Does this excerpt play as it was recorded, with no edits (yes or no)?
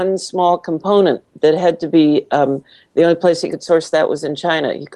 yes